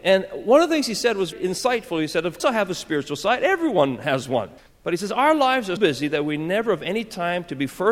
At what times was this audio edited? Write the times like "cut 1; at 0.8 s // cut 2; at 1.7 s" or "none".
cut 1; at 1.3 s // cut 2; at 2.4 s // cut 3; at 4.6 s // cut 4; at 5.8 s